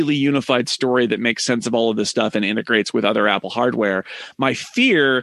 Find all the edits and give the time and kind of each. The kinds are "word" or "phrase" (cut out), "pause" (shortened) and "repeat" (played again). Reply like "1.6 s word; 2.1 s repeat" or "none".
none